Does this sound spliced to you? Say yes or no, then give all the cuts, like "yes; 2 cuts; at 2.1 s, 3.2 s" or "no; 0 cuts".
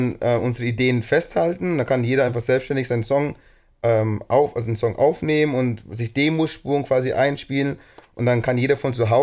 no; 0 cuts